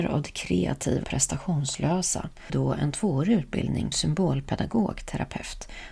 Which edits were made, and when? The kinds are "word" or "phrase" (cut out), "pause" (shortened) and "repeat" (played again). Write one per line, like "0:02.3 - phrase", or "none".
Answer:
0:01.0 - word
0:02.5 - phrase
0:03.9 - word